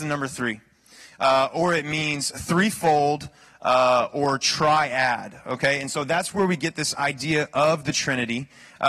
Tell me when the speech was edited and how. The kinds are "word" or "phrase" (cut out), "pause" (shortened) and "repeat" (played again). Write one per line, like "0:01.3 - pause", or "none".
none